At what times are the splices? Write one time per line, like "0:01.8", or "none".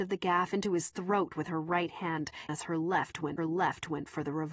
0:02.5
0:03.4